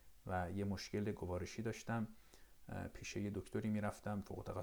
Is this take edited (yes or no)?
no